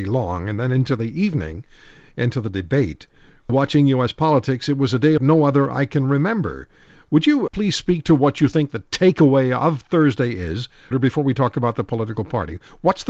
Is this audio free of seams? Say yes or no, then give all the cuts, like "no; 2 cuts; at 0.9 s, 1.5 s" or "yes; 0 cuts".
no; 4 cuts; at 3.5 s, 5.2 s, 7.5 s, 10.9 s